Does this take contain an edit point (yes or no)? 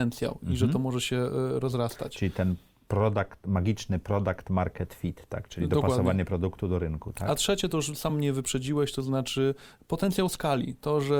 no